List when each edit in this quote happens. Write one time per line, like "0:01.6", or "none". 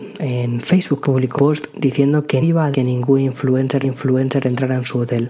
0:01.0
0:01.4
0:02.4
0:02.7
0:03.8